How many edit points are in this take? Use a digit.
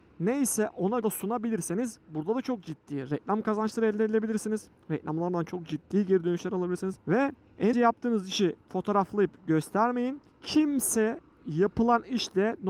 3